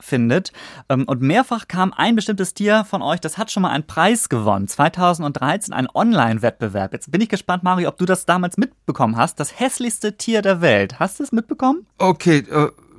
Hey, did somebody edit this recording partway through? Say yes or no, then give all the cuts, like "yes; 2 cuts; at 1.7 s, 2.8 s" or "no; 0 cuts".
no; 0 cuts